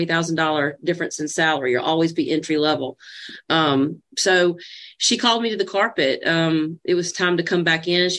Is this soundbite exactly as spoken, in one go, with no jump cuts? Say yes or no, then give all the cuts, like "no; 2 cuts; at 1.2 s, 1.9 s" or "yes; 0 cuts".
yes; 0 cuts